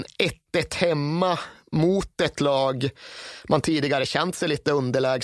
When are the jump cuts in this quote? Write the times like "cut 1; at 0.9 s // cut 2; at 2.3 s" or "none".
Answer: none